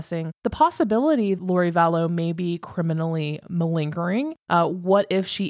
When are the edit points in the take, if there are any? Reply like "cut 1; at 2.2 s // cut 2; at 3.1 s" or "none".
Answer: cut 1; at 1.4 s

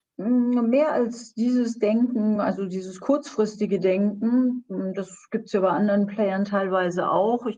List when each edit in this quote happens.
none

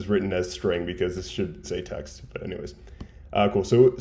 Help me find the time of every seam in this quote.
cut 1; at 1.6 s

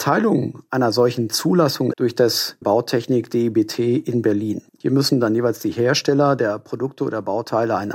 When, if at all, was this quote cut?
cut 1; at 1.9 s // cut 2; at 2.6 s // cut 3; at 4.7 s

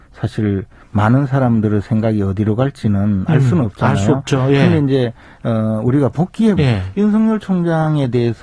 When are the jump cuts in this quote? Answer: cut 1; at 6.6 s

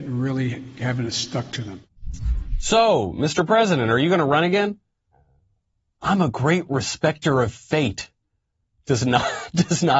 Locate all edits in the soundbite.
none

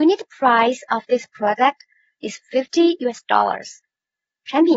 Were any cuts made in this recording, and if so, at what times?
none

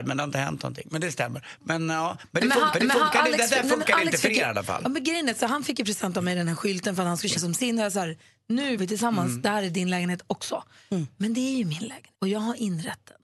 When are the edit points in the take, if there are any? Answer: cut 1; at 2.7 s // cut 2; at 7.3 s // cut 3; at 8.8 s // cut 4; at 12.1 s

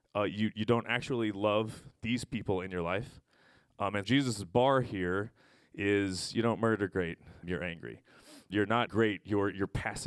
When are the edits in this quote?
cut 1; at 4.0 s // cut 2; at 7.4 s // cut 3; at 8.5 s // cut 4; at 8.9 s

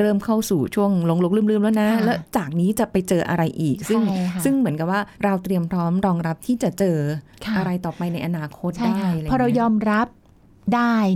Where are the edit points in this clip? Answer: cut 1; at 5.1 s

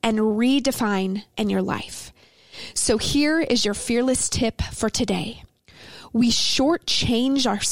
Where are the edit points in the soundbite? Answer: cut 1; at 1.3 s

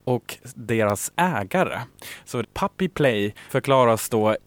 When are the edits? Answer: cut 1; at 2.4 s // cut 2; at 3.5 s

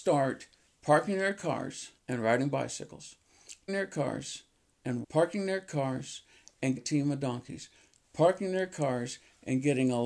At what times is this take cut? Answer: cut 1; at 2.0 s // cut 2; at 3.7 s // cut 3; at 5.0 s // cut 4; at 6.8 s

